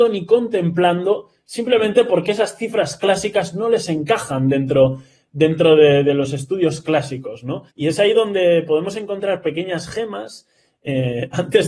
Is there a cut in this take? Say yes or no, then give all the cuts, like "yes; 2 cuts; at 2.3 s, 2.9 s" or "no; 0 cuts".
yes; 1 cut; at 7.7 s